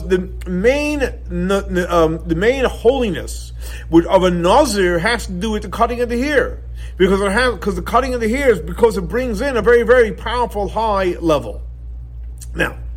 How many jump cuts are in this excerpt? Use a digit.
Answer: 0